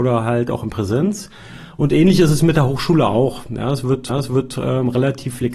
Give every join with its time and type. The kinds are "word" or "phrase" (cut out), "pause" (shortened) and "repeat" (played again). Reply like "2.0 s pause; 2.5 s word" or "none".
4.1 s repeat